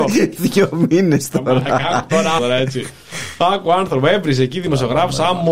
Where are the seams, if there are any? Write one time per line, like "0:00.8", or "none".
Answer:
0:02.4